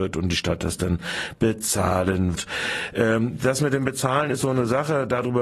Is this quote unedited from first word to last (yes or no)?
no